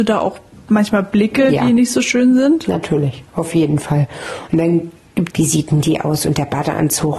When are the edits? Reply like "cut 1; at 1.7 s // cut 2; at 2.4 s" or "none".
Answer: cut 1; at 5.3 s